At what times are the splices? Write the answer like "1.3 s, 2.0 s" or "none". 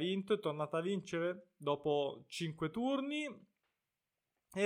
none